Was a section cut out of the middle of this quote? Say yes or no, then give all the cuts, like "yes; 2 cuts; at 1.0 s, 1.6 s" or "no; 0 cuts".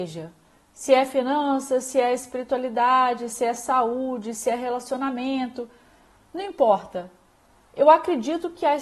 no; 0 cuts